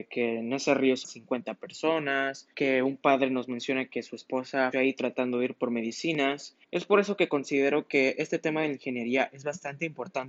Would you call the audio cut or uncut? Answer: cut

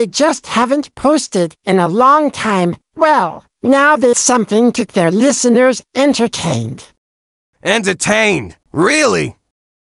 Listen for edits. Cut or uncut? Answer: cut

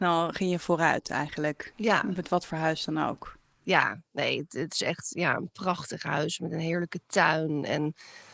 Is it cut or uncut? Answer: uncut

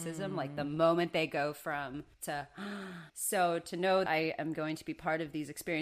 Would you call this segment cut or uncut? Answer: cut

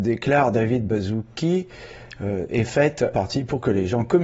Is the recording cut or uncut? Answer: cut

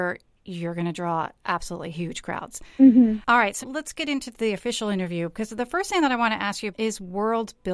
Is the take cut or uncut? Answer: cut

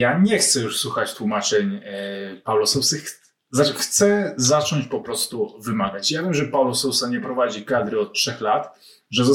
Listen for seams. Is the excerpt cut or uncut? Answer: uncut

